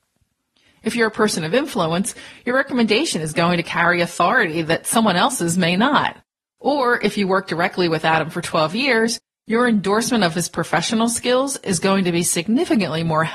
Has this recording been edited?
no; 0 cuts

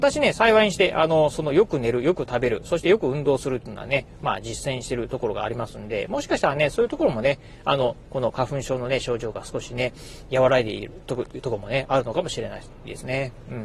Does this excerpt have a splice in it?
no; 0 cuts

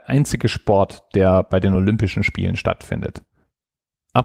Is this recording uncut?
yes; 0 cuts

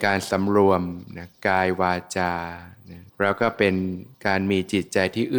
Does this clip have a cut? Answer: yes; 2 cuts; at 3.1 s, 4.1 s

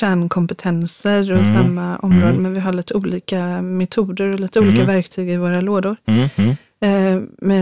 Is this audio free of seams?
yes; 0 cuts

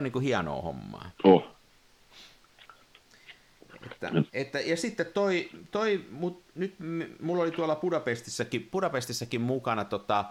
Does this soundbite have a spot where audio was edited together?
yes; 2 cuts; at 1.1 s, 4.3 s

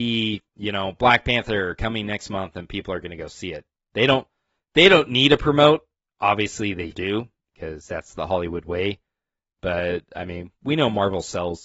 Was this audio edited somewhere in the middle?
yes; 1 cut; at 6.9 s

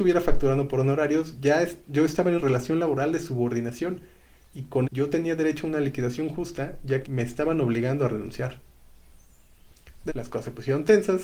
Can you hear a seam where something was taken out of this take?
yes; 4 cuts; at 2.4 s, 4.8 s, 7.0 s, 10.1 s

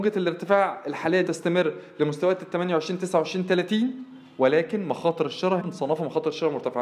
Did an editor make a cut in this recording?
yes; 2 cuts; at 1.3 s, 5.6 s

